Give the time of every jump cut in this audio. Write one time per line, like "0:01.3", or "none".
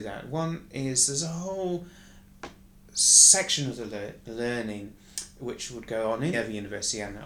0:06.3